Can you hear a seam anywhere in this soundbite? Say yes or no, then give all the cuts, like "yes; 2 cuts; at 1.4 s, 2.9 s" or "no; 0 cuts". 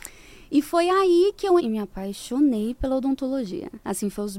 yes; 1 cut; at 1.6 s